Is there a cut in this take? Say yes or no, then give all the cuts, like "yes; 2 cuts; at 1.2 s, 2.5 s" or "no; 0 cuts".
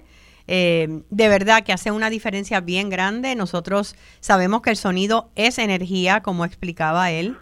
no; 0 cuts